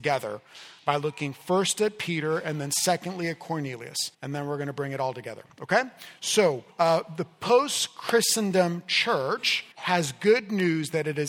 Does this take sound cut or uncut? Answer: cut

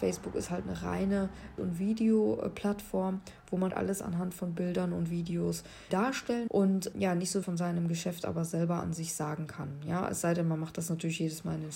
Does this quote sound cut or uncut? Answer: cut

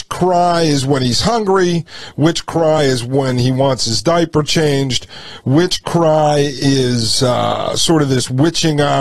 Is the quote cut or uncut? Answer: uncut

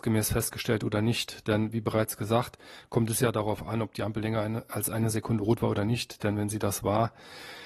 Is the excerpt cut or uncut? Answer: uncut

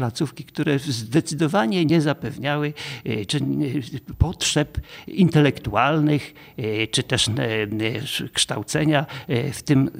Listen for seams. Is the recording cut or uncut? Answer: uncut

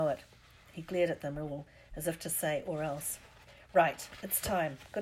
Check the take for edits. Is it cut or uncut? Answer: uncut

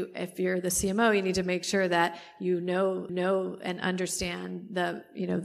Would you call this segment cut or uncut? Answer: cut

